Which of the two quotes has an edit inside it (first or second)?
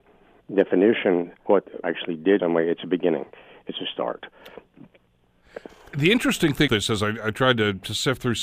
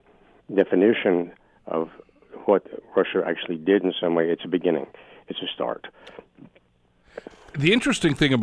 first